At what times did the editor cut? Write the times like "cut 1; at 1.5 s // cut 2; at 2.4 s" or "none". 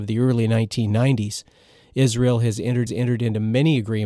cut 1; at 2.9 s